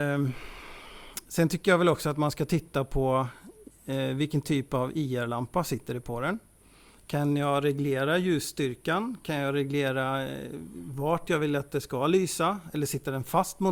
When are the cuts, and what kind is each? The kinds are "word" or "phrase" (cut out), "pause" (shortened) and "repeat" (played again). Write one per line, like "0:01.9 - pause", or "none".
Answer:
none